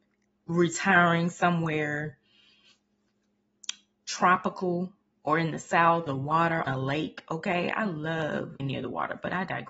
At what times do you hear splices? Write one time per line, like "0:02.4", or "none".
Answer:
0:05.1
0:06.1
0:06.7
0:08.6